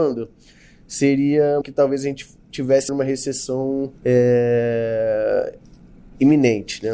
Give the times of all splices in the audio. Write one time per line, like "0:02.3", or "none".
0:01.6
0:02.9
0:04.0